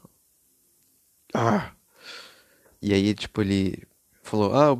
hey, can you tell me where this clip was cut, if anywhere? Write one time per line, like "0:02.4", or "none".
none